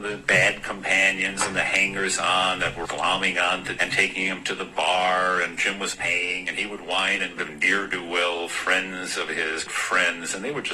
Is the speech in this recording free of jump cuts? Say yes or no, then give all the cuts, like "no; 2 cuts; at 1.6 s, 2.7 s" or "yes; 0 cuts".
no; 5 cuts; at 2.8 s, 3.8 s, 5.9 s, 7.4 s, 9.7 s